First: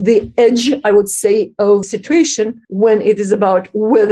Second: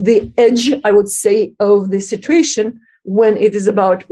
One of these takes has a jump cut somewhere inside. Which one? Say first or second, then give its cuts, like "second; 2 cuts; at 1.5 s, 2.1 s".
first; 2 cuts; at 1.8 s, 2.6 s